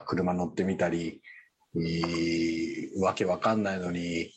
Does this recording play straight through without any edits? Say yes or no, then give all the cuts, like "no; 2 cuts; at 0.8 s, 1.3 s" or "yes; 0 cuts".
yes; 0 cuts